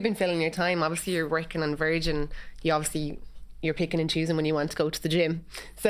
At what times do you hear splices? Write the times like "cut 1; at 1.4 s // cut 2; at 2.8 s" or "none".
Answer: none